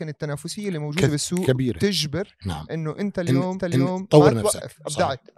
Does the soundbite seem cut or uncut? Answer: cut